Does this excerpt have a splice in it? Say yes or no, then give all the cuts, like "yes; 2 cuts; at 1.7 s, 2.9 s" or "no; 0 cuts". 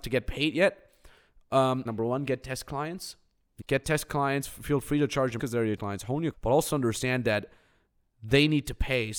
yes; 5 cuts; at 1.8 s, 3.6 s, 5.4 s, 5.8 s, 6.3 s